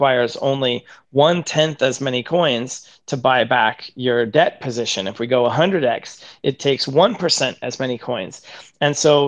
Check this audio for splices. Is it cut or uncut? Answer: uncut